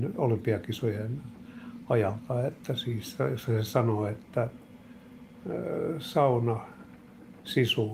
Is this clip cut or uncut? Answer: uncut